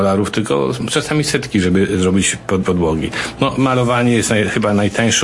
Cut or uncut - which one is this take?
cut